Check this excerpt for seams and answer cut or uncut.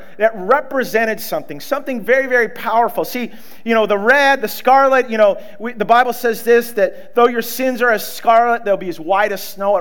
uncut